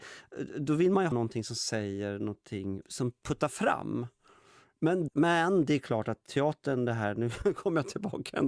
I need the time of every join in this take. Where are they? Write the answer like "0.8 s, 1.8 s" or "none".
1.1 s, 2.8 s, 5.1 s